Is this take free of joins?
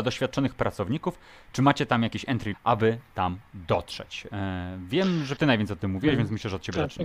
no; 2 cuts; at 2.5 s, 5.4 s

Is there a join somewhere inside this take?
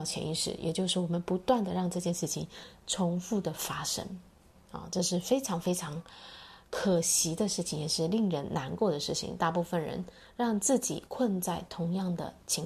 no; 0 cuts

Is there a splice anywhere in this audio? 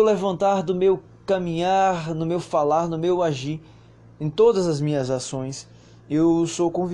no; 0 cuts

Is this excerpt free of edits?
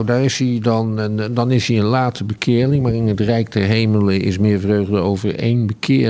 yes; 0 cuts

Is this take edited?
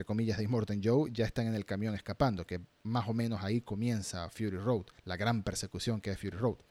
yes; 1 cut; at 5.0 s

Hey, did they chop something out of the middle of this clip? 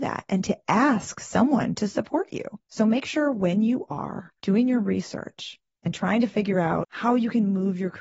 no; 0 cuts

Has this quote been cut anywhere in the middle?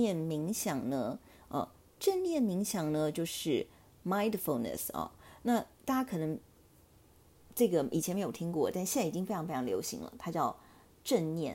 no; 0 cuts

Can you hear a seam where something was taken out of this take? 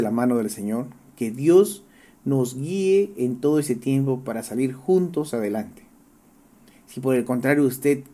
no; 0 cuts

